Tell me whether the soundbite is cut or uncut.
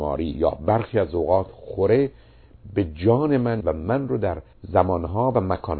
cut